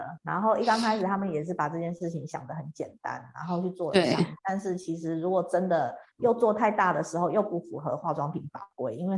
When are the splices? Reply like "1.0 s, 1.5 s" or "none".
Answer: 4.4 s